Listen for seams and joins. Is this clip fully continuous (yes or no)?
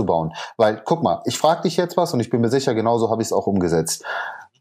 yes